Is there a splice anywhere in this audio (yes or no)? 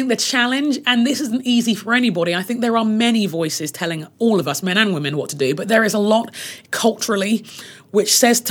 no